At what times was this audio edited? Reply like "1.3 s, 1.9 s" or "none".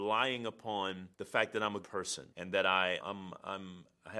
1.1 s, 1.8 s, 2.3 s, 3.0 s